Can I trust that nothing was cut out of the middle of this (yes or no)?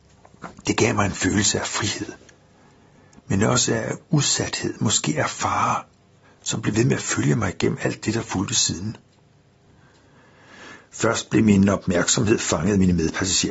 yes